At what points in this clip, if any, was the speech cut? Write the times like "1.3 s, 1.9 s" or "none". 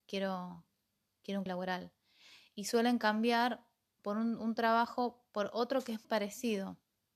1.5 s, 4.0 s, 6.0 s